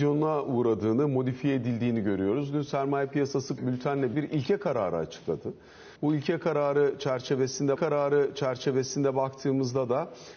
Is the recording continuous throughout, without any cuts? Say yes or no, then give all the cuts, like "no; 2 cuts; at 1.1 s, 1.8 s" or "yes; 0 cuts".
no; 4 cuts; at 3.6 s, 4.1 s, 6.0 s, 7.8 s